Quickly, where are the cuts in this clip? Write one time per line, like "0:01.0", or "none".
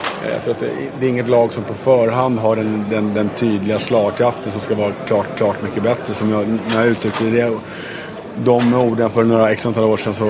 0:05.3